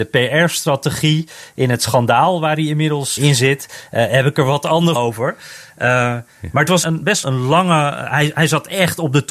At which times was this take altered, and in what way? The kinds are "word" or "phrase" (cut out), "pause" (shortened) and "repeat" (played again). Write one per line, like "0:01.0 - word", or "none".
0:03.2 - word
0:05.0 - word
0:06.8 - word
0:07.2 - word